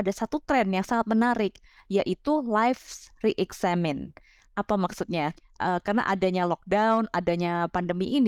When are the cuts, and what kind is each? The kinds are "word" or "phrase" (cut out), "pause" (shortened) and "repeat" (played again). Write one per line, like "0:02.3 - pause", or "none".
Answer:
none